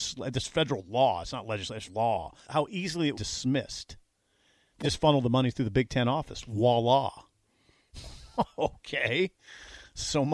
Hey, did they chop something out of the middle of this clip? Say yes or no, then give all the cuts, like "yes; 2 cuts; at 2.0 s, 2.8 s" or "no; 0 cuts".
yes; 4 cuts; at 1.9 s, 2.4 s, 3.1 s, 4.8 s